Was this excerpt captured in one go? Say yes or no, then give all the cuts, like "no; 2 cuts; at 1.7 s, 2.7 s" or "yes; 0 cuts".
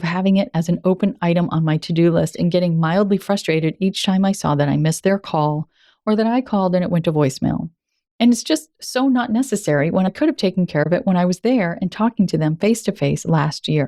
yes; 0 cuts